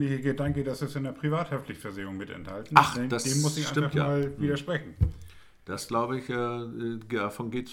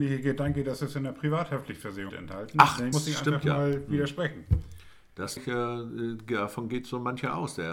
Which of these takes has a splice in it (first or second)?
second